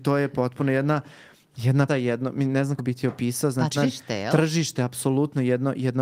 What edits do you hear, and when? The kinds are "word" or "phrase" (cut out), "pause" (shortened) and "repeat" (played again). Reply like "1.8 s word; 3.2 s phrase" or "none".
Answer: 1.9 s word; 2.8 s word; 3.7 s word

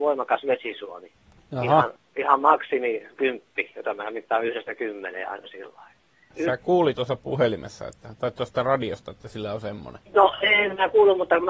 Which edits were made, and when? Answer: 6.9 s word; 10.1 s pause

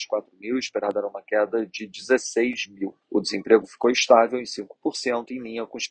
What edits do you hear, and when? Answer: 3.0 s pause

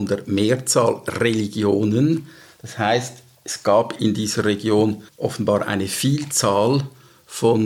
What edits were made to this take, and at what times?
5.1 s pause

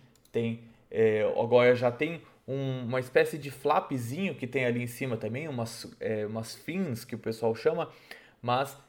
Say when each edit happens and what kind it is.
none

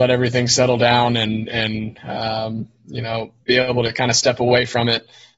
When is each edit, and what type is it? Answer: 3.4 s pause

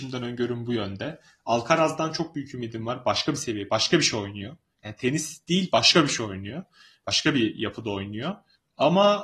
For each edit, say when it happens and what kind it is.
none

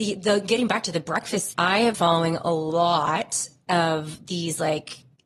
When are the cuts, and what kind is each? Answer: 1.5 s word; 1.9 s word

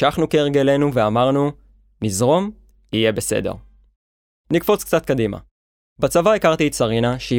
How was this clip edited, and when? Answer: none

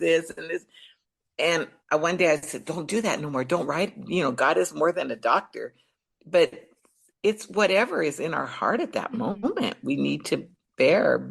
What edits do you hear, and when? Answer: none

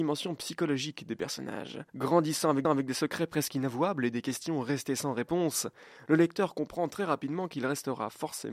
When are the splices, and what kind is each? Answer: 1.9 s pause; 2.6 s repeat

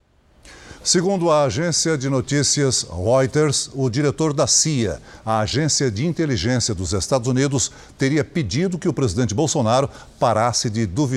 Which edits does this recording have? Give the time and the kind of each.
none

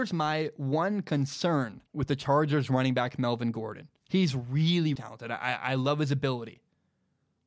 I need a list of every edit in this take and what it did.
1.9 s pause; 4.0 s pause; 5.0 s word

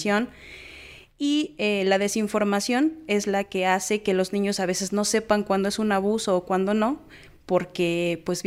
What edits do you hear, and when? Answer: none

